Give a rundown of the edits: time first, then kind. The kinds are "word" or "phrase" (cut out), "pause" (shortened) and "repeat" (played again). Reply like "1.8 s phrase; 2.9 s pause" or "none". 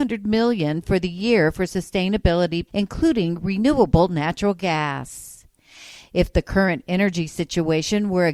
2.7 s word